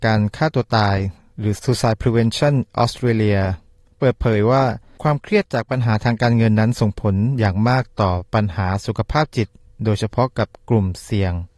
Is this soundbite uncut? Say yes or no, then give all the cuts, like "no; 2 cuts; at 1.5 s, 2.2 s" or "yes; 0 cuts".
yes; 0 cuts